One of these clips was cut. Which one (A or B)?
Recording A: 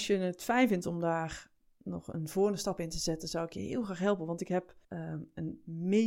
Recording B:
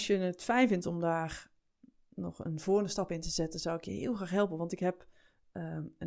A